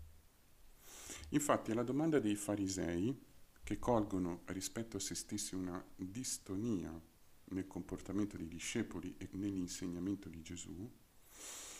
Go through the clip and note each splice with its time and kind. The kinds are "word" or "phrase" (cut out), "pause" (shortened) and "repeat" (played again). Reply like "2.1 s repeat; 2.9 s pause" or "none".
9.3 s word